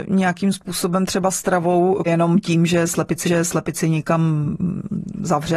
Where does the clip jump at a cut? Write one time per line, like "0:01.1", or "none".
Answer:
0:02.1
0:03.3